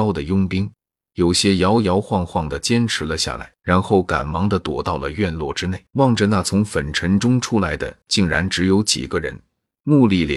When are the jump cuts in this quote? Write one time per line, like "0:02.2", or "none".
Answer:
0:03.6
0:05.9